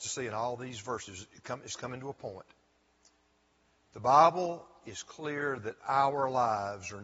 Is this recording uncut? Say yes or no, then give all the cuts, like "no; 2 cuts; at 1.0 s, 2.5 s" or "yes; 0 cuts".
yes; 0 cuts